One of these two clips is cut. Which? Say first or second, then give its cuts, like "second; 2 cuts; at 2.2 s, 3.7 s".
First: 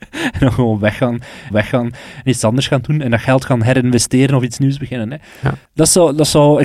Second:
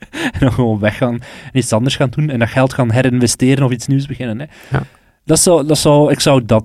first; 2 cuts; at 1.5 s, 5.6 s